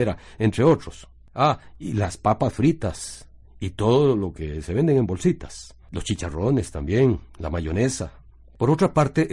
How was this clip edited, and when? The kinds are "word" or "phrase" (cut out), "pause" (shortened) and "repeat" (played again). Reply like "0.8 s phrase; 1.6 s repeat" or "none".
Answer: none